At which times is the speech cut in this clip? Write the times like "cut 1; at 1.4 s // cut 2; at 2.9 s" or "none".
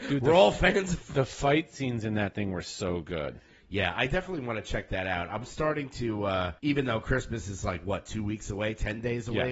cut 1; at 6.6 s